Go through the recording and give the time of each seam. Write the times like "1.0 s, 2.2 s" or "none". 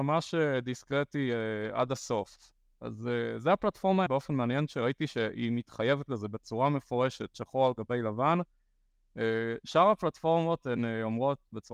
4.1 s